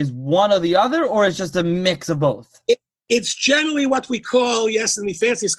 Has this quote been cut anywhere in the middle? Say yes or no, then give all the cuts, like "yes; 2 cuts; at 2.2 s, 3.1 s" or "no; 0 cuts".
no; 0 cuts